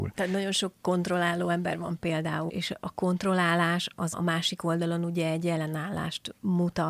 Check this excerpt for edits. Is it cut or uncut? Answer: cut